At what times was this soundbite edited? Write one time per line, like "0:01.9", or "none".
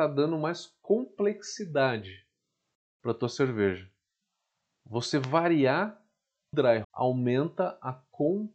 0:06.5
0:06.8